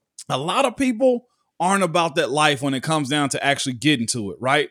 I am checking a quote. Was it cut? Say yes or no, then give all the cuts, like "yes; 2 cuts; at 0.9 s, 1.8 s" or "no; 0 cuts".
no; 0 cuts